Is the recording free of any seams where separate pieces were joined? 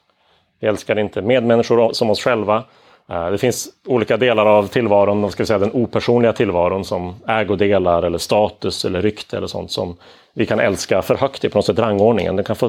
yes; 0 cuts

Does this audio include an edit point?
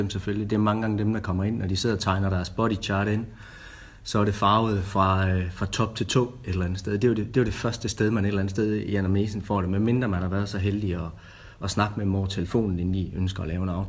no; 0 cuts

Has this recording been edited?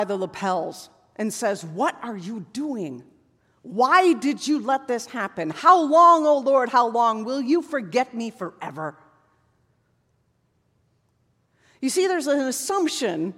no; 0 cuts

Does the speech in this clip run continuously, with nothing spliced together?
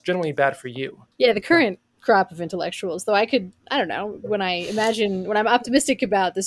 no; 1 cut; at 1.1 s

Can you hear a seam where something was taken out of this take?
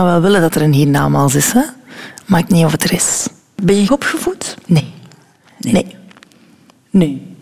yes; 2 cuts; at 2.5 s, 3.9 s

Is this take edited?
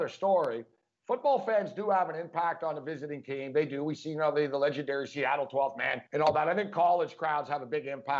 yes; 1 cut; at 6.1 s

